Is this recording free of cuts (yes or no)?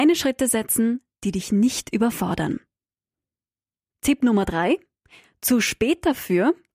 yes